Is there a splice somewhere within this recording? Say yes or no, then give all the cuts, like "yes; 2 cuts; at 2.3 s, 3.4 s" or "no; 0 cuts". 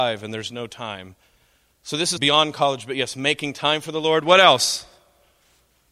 yes; 1 cut; at 2.2 s